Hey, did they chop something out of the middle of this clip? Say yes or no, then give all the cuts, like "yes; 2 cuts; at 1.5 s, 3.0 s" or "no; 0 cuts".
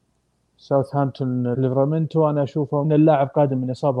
yes; 2 cuts; at 1.5 s, 2.8 s